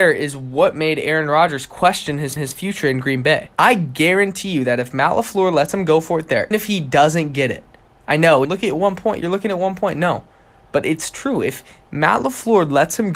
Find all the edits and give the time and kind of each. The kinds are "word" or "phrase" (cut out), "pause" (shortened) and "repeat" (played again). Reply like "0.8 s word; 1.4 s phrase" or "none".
2.4 s repeat; 3.5 s pause; 6.5 s word; 8.4 s phrase